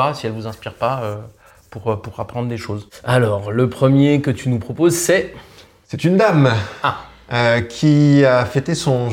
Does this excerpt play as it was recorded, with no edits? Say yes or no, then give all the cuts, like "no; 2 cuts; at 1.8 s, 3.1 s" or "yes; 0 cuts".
yes; 0 cuts